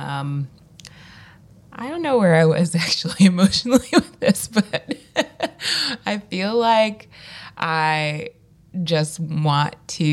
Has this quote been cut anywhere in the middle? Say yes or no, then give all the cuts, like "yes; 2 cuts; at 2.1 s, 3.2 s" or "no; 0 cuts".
no; 0 cuts